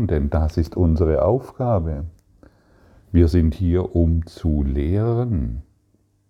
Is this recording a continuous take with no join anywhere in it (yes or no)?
yes